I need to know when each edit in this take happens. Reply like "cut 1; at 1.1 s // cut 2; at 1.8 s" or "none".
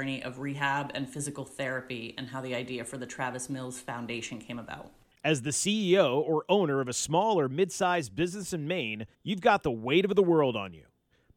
cut 1; at 9.1 s